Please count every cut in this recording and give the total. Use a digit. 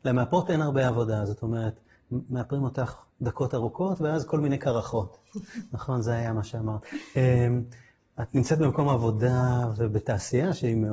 1